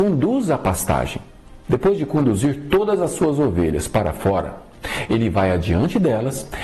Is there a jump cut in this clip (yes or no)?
no